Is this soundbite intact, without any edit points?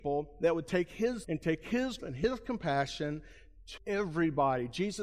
no; 3 cuts; at 1.2 s, 2.0 s, 3.8 s

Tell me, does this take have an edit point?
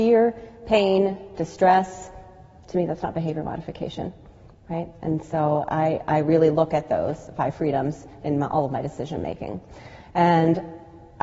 no; 0 cuts

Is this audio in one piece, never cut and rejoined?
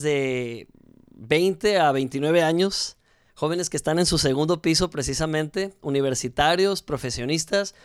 yes; 0 cuts

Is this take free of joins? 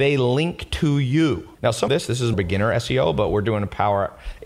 no; 3 cuts; at 1.5 s, 1.9 s, 2.3 s

